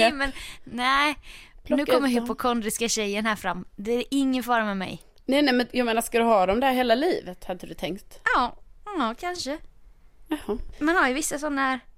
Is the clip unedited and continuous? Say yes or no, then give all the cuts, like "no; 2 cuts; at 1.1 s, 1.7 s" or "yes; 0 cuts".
yes; 0 cuts